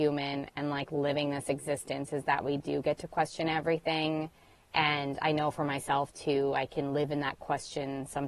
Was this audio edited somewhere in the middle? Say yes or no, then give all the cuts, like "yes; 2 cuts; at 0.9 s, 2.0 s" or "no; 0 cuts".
no; 0 cuts